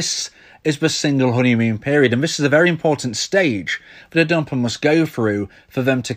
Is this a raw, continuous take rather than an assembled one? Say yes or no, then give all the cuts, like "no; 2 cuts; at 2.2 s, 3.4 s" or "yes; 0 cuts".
yes; 0 cuts